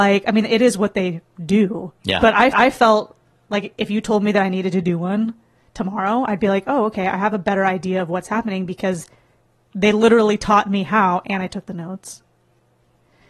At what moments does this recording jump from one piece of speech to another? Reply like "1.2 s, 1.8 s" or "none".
2.0 s, 2.5 s